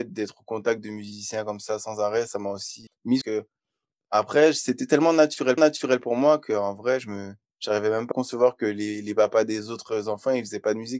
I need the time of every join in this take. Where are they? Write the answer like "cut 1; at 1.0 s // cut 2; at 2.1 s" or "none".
cut 1; at 2.9 s // cut 2; at 3.2 s // cut 3; at 5.6 s // cut 4; at 7.4 s // cut 5; at 8.1 s